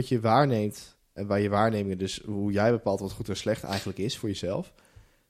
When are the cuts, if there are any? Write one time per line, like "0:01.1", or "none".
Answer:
0:01.2